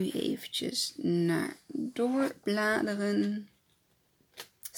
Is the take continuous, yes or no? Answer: yes